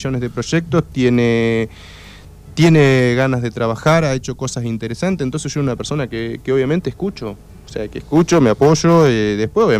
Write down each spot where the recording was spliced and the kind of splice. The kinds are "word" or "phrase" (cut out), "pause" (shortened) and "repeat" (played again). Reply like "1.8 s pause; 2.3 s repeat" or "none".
none